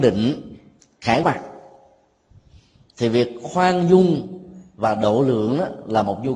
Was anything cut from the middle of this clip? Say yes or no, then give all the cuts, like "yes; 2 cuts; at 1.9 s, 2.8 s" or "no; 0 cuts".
yes; 1 cut; at 1.2 s